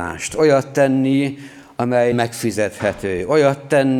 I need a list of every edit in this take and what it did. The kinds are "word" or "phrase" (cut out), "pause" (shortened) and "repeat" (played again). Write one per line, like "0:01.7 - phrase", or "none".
0:02.1 - word

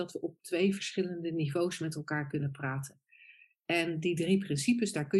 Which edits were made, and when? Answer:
none

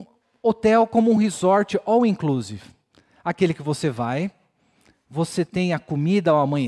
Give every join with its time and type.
none

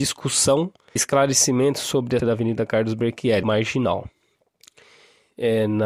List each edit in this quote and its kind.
0:01.0 - word
0:02.2 - word
0:03.4 - phrase

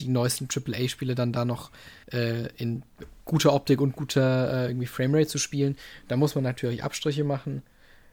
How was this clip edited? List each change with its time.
0:02.0 - word

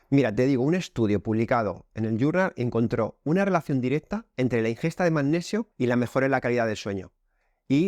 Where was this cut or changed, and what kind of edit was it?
0:05.7 - pause

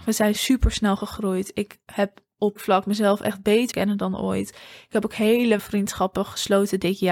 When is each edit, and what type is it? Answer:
0:02.6 - word
0:03.7 - word
0:05.6 - word

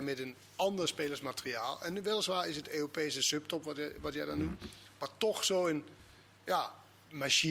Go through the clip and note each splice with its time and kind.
none

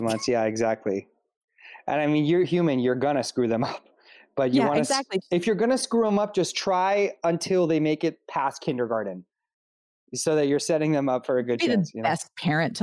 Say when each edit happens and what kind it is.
none

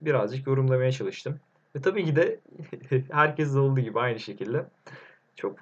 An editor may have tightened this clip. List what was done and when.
none

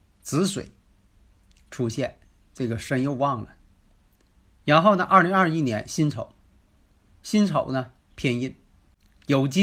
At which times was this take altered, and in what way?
none

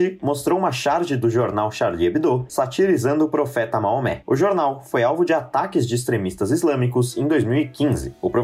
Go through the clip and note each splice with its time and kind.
none

